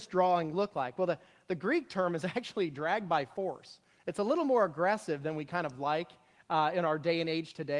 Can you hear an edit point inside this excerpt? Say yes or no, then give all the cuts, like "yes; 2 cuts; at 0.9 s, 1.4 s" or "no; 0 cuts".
no; 0 cuts